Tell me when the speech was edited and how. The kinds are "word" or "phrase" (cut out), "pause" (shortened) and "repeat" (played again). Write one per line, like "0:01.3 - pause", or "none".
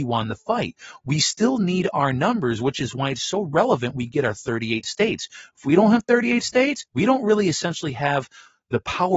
0:06.9 - pause

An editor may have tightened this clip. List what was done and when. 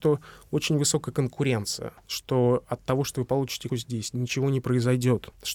0:03.7 - word

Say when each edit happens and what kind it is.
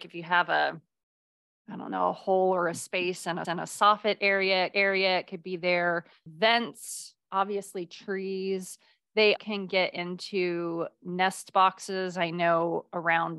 0:03.4 - repeat
0:04.7 - repeat
0:09.4 - word

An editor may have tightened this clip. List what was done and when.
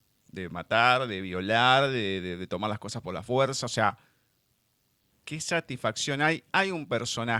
none

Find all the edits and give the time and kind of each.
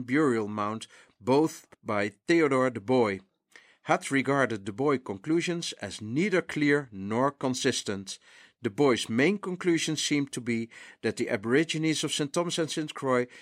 0:01.7 - pause

